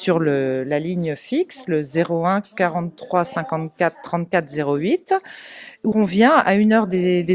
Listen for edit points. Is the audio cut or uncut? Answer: cut